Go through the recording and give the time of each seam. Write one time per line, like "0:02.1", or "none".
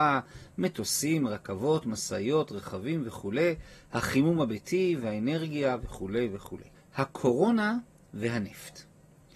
0:06.7